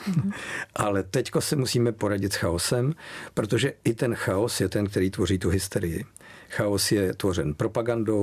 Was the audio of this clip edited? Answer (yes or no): no